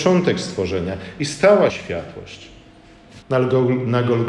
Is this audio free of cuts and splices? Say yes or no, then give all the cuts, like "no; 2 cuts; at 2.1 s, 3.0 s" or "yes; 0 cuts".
no; 2 cuts; at 1.7 s, 3.2 s